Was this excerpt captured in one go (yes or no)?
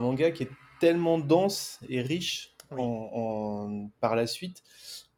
yes